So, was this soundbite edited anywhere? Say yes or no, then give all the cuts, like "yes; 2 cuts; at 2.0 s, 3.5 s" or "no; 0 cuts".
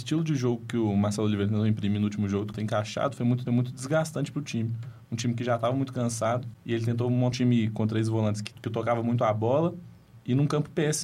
yes; 4 cuts; at 2.5 s, 3.5 s, 7.3 s, 8.5 s